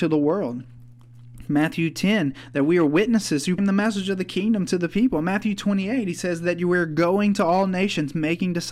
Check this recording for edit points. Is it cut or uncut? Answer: cut